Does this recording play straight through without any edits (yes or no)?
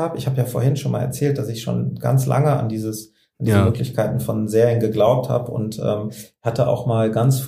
yes